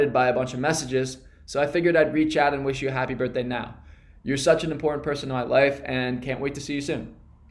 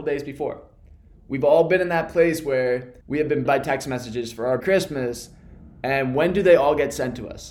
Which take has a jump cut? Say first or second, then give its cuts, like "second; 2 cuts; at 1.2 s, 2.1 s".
second; 3 cuts; at 3.0 s, 3.5 s, 4.6 s